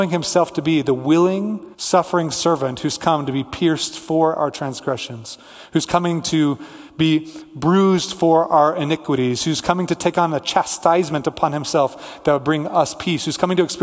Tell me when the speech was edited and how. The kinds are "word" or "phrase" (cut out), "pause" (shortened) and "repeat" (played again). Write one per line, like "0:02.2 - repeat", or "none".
0:01.7 - pause